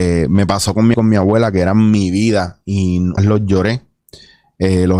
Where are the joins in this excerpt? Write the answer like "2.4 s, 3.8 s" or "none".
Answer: 0.9 s, 3.2 s